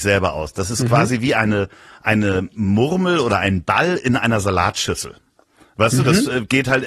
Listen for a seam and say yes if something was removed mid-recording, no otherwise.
no